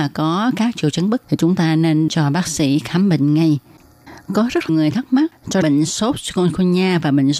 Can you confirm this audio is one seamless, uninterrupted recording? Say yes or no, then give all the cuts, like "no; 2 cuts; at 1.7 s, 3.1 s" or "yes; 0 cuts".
no; 4 cuts; at 1.2 s, 2.1 s, 4.7 s, 5.6 s